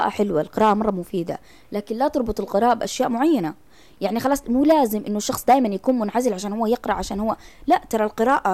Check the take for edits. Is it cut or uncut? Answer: uncut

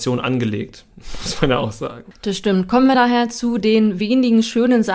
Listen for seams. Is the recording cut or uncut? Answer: uncut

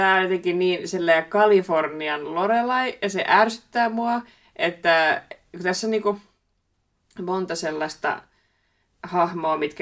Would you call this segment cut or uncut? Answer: uncut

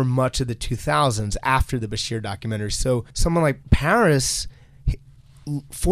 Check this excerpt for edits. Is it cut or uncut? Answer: cut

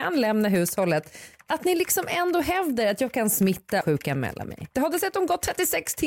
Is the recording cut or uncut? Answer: cut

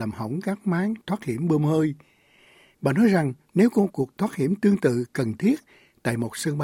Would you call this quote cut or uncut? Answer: cut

